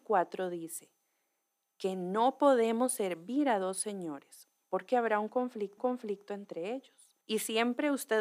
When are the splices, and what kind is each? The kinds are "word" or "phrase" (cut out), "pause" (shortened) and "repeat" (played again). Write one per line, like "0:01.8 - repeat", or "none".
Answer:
0:05.8 - repeat
0:07.2 - pause